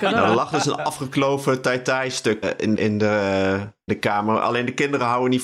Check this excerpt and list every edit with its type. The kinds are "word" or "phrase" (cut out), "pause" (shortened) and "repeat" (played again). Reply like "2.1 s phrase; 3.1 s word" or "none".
2.4 s word; 2.8 s word; 3.9 s word